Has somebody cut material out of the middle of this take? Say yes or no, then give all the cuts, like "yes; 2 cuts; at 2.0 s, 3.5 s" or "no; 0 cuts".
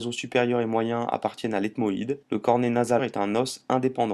yes; 2 cuts; at 2.2 s, 3.0 s